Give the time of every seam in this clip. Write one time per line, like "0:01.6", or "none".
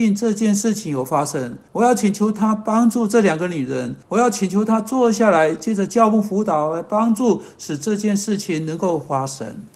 0:01.7
0:04.0